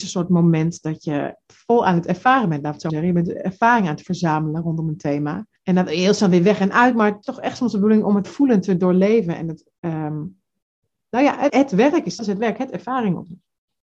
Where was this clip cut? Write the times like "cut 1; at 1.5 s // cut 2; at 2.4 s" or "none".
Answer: cut 1; at 2.9 s // cut 2; at 5.6 s // cut 3; at 7.2 s // cut 4; at 8.2 s // cut 5; at 11.5 s // cut 6; at 12.2 s